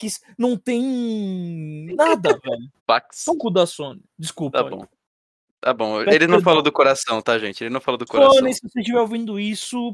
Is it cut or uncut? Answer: cut